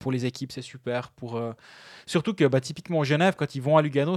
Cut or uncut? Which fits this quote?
uncut